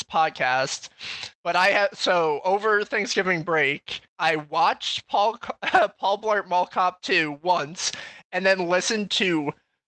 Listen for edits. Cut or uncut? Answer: cut